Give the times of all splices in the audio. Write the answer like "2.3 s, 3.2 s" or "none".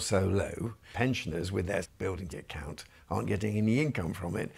0.9 s, 1.8 s, 2.3 s